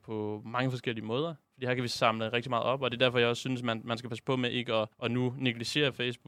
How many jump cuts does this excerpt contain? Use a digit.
2